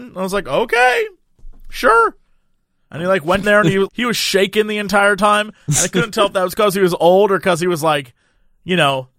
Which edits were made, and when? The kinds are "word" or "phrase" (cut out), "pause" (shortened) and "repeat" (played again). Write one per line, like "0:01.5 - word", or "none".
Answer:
0:03.4 - word
0:03.9 - word